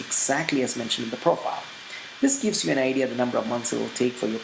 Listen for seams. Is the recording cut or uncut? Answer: uncut